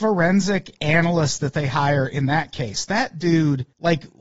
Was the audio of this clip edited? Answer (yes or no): no